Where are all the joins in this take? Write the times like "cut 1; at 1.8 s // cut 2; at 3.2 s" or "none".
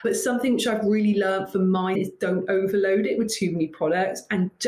cut 1; at 1.9 s